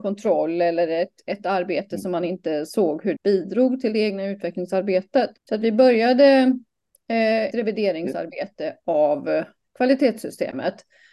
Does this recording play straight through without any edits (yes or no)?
no